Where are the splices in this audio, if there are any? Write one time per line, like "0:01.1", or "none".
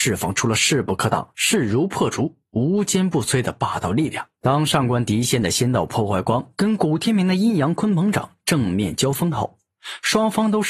0:04.4